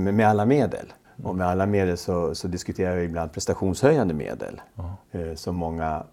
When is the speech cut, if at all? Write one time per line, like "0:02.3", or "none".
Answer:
0:01.0
0:05.0